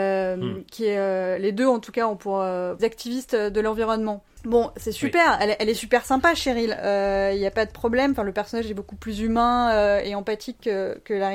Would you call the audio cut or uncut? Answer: cut